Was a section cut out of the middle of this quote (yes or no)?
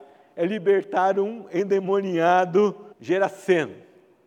yes